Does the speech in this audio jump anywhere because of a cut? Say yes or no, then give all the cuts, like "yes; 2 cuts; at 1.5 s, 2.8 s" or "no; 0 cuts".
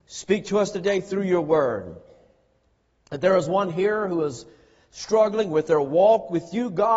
no; 0 cuts